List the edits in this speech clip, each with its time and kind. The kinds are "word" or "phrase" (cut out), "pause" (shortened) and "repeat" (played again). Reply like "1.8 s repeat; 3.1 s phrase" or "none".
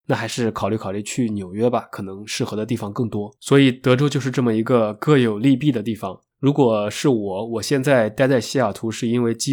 3.4 s pause; 6.3 s pause